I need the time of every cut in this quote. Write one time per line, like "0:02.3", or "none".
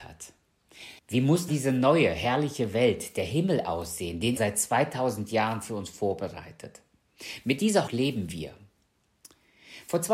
0:01.0
0:01.5
0:04.4
0:07.9